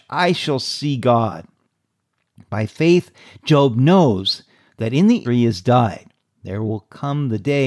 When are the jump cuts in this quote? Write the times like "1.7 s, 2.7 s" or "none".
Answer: 5.2 s